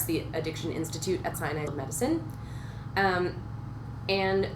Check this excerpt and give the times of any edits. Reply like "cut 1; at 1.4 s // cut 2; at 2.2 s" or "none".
cut 1; at 1.3 s // cut 2; at 1.7 s